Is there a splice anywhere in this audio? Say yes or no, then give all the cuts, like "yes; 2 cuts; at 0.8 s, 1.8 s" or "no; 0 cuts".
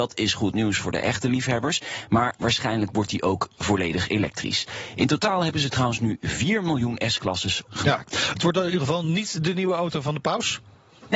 yes; 1 cut; at 7.7 s